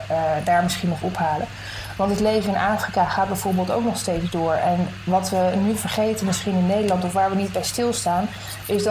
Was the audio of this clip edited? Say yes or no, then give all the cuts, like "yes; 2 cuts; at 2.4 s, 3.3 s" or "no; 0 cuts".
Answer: yes; 1 cut; at 1.0 s